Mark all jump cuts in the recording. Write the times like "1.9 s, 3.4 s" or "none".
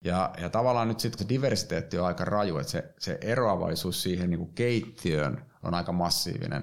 1.2 s